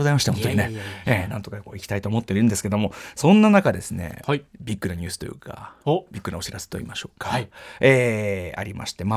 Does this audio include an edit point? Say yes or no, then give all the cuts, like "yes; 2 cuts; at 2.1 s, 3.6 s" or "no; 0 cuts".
yes; 1 cut; at 4.5 s